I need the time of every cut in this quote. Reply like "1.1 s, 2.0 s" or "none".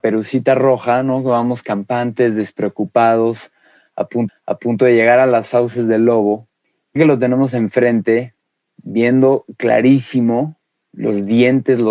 4.3 s, 7.0 s